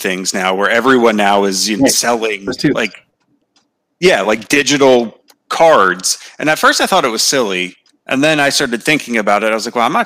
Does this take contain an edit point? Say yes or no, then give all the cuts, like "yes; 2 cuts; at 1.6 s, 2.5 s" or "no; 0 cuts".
no; 0 cuts